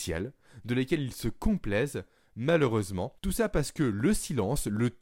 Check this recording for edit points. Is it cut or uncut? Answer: cut